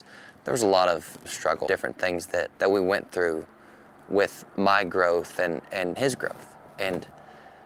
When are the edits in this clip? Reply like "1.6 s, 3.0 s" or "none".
1.2 s, 1.7 s, 2.6 s, 6.0 s